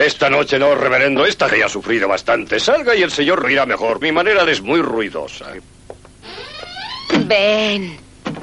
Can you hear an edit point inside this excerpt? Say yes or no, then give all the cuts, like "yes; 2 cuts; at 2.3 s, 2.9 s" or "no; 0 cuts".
yes; 4 cuts; at 1.5 s, 3.4 s, 4.0 s, 4.5 s